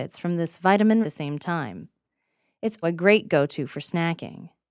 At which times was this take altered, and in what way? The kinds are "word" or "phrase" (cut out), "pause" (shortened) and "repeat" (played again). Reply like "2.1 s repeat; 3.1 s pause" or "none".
1.0 s phrase; 2.8 s word